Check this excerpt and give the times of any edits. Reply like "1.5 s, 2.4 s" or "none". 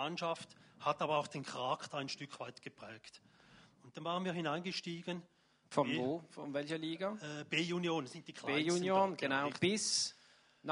none